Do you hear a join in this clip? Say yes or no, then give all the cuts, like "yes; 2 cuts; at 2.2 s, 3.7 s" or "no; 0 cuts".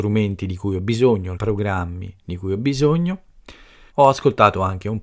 yes; 3 cuts; at 1.4 s, 2.2 s, 3.9 s